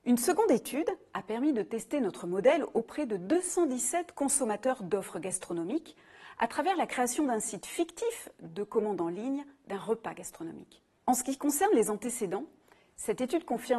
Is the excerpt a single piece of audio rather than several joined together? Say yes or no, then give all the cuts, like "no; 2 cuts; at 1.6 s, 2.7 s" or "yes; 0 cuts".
yes; 0 cuts